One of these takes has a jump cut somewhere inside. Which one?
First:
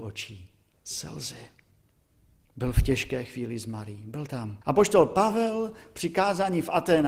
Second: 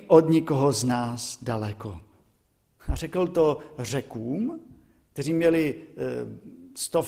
first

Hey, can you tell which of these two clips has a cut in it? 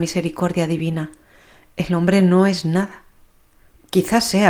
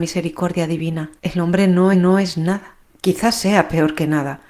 second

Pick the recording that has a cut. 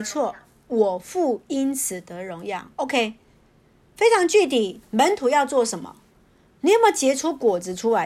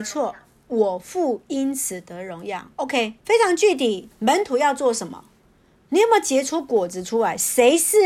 second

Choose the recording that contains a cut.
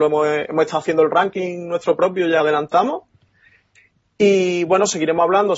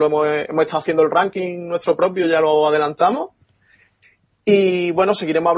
first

